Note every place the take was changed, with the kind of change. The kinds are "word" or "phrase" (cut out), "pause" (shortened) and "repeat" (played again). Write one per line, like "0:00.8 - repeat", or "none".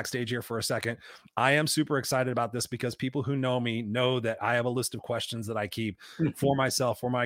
none